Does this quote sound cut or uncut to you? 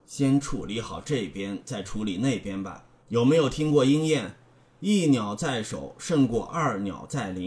cut